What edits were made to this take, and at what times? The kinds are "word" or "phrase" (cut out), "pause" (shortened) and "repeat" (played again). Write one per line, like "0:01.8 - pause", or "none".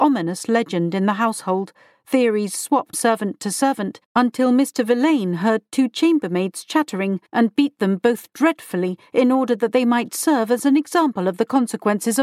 0:02.9 - word
0:04.1 - pause
0:07.3 - pause